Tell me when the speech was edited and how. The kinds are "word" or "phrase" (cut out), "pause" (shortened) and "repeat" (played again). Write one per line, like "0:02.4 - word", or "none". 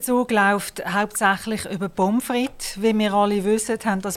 none